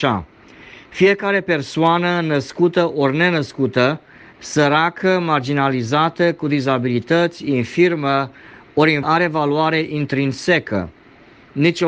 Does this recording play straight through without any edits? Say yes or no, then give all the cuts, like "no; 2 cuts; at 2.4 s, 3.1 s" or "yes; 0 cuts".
no; 1 cut; at 9.0 s